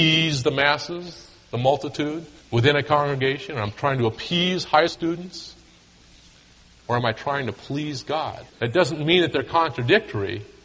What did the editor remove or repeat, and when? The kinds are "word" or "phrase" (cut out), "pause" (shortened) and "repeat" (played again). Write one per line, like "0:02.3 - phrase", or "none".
0:02.4 - pause
0:04.9 - word
0:08.5 - pause

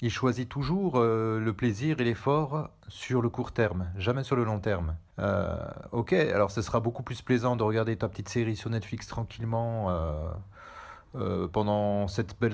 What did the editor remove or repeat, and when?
0:05.1 - pause

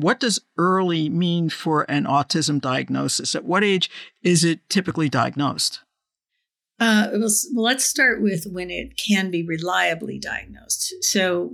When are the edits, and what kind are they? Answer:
none

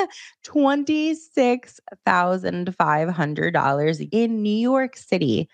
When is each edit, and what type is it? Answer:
0:04.1 - word

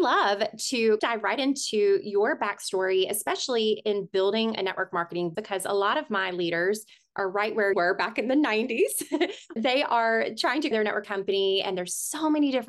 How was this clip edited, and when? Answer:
0:05.3 - word
0:07.7 - word
0:09.6 - word
0:10.7 - word
0:11.0 - word

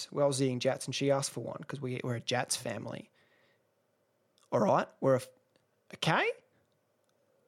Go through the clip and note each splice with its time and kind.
none

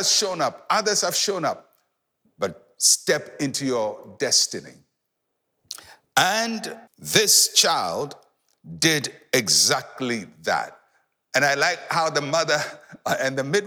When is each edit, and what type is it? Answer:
0:06.9 - pause

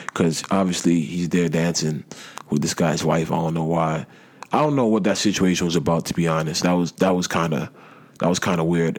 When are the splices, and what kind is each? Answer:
0:06.6 - word

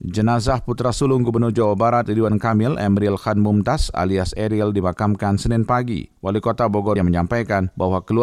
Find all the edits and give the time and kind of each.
0:07.0 - phrase

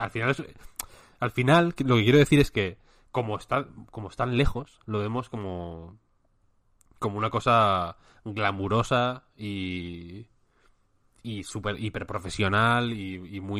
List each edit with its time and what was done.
none

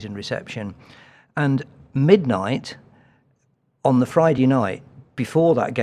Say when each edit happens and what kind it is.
none

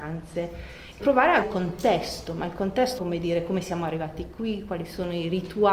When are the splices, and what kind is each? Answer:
0:01.0 - word
0:01.4 - word
0:03.0 - phrase

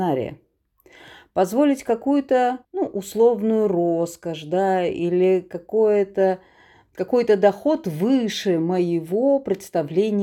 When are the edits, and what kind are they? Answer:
0:02.6 - pause

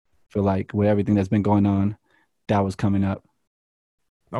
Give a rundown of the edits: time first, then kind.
none

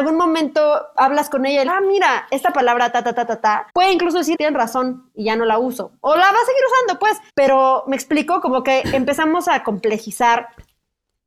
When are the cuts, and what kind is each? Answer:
0:01.7 - word
0:03.7 - pause
0:04.3 - word
0:07.3 - pause

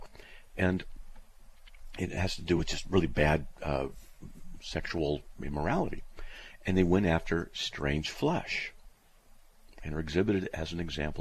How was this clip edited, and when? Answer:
none

